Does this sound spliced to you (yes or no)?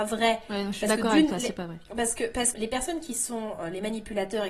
yes